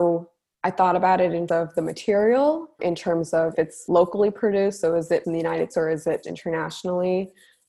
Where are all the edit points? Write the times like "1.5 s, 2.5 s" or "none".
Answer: 1.5 s, 2.8 s, 3.5 s, 5.2 s, 5.7 s, 6.2 s